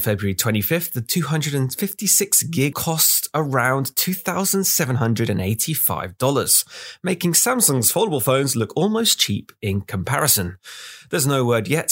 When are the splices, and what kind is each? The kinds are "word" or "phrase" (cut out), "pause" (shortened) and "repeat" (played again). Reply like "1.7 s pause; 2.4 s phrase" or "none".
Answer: 2.7 s phrase